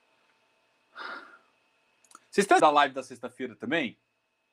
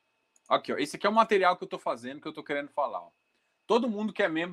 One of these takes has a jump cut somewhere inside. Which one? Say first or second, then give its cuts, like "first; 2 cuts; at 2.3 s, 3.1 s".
first; 1 cut; at 2.6 s